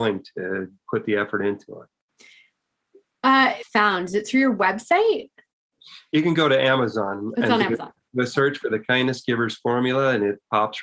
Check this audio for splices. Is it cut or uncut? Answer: cut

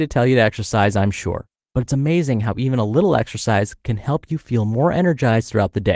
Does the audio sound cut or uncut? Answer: uncut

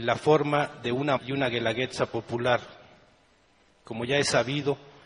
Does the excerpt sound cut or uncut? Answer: cut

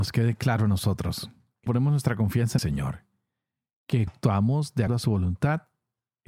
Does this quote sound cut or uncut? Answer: cut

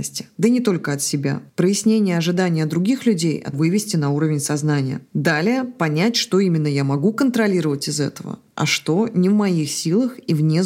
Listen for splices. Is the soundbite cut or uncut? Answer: cut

